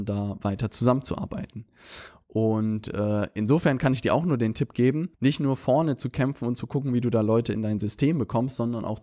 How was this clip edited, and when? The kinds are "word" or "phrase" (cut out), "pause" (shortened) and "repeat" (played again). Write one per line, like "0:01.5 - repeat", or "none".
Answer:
0:05.1 - pause